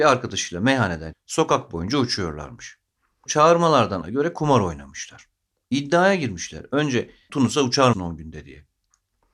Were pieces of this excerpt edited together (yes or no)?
yes